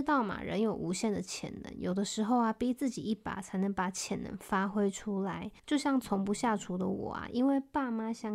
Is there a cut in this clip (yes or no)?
no